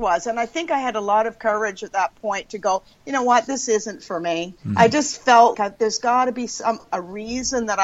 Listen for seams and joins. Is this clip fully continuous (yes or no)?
no